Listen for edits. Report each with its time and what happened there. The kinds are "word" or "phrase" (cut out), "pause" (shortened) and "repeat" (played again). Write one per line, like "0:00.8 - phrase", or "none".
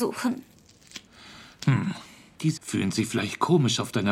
0:02.6 - word